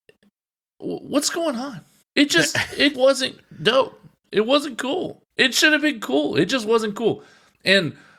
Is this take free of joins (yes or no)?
no